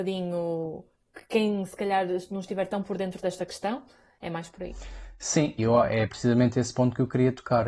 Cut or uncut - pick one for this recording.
cut